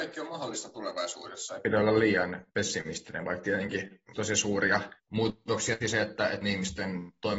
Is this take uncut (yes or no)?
no